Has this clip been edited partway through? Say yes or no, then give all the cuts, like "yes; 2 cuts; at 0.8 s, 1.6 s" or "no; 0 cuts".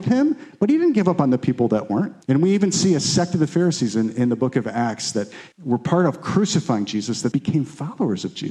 yes; 3 cuts; at 2.2 s, 5.5 s, 7.3 s